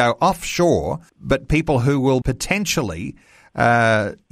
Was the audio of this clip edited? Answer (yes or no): yes